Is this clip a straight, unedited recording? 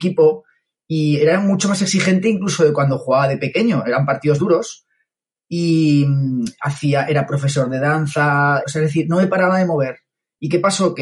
no; 2 cuts; at 4.4 s, 8.6 s

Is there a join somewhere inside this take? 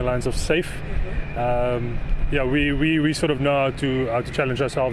no; 0 cuts

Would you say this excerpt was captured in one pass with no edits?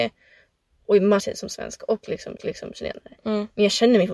no; 2 cuts; at 1.2 s, 2.4 s

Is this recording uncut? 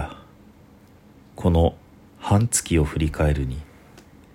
yes; 0 cuts

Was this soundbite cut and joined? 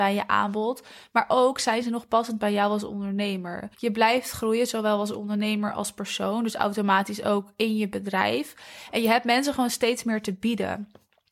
yes; 1 cut; at 3.7 s

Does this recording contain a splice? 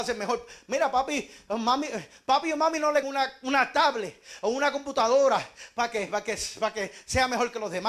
yes; 1 cut; at 3.0 s

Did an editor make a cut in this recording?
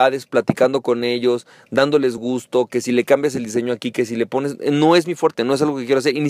no; 0 cuts

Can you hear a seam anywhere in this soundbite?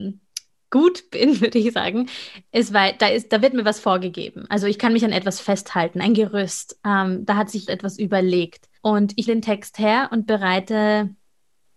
yes; 3 cuts; at 7.7 s, 8.7 s, 9.3 s

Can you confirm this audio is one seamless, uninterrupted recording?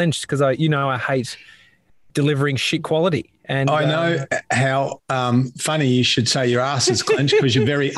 yes; 0 cuts

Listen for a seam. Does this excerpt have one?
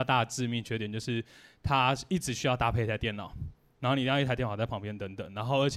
no; 0 cuts

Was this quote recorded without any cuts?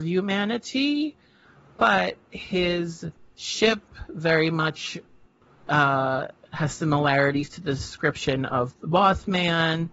yes; 0 cuts

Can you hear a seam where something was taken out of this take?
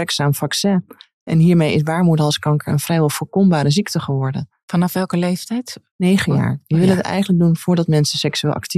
no; 0 cuts

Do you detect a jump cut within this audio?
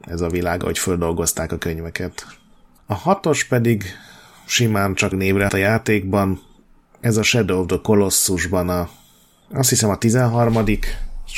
yes; 2 cuts; at 5.1 s, 5.5 s

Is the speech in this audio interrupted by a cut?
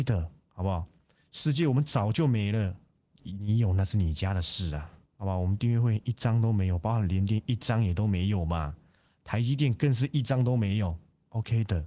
no; 0 cuts

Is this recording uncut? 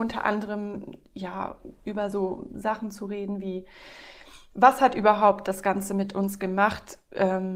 yes; 0 cuts

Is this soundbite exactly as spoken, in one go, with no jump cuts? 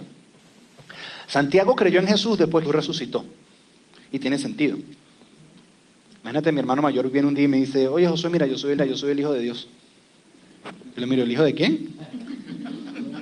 no; 2 cuts; at 2.7 s, 8.8 s

